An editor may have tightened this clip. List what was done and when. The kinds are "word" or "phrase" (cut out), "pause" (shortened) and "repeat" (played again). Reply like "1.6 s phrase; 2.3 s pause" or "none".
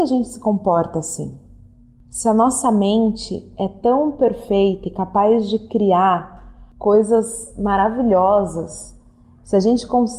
none